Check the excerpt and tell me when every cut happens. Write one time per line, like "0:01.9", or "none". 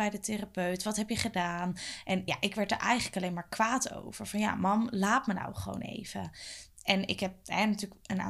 none